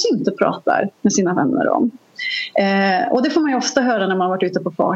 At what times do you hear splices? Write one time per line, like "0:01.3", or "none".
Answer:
none